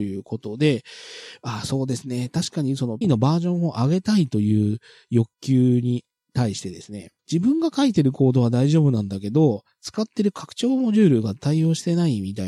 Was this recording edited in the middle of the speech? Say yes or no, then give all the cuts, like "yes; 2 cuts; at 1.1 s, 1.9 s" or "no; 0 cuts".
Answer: yes; 3 cuts; at 3.0 s, 5.3 s, 7.2 s